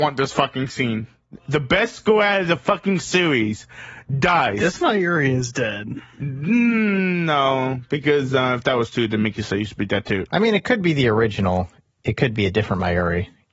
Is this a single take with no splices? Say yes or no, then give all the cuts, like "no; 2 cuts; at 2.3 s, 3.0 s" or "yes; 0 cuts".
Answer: yes; 0 cuts